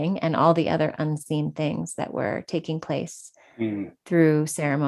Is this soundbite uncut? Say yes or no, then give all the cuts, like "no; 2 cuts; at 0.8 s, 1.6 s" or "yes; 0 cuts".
yes; 0 cuts